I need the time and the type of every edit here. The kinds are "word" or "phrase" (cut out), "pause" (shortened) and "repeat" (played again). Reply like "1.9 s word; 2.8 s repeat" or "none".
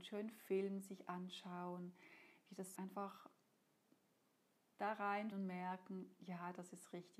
2.8 s word; 5.3 s word

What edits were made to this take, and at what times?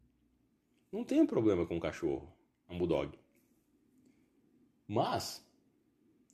none

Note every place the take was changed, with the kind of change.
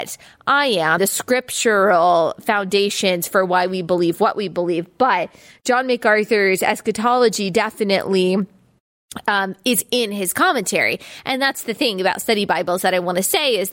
1.0 s word

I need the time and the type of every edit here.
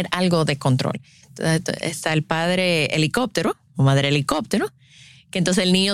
none

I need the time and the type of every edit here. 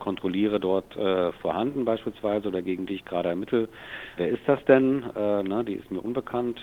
4.2 s word

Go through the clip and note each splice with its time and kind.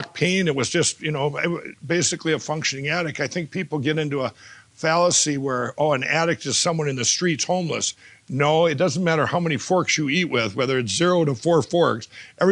none

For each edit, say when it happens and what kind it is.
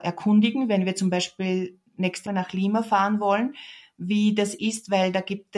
2.3 s word

